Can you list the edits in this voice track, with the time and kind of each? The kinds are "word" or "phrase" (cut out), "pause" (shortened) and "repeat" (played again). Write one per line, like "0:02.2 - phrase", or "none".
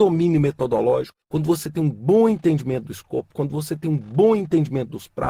0:01.2 - pause